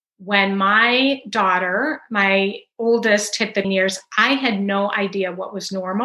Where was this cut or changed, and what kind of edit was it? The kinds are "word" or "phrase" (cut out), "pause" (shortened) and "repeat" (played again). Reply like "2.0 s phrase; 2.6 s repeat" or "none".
3.6 s word

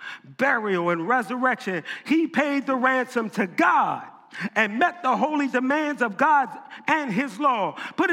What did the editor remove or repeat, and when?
none

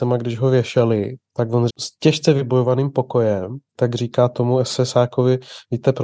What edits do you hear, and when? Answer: 1.2 s pause; 1.7 s word; 3.7 s pause

